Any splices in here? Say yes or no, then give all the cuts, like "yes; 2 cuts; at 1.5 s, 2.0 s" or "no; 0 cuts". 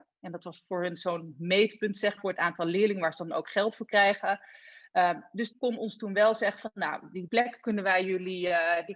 yes; 3 cuts; at 2.2 s, 5.5 s, 7.3 s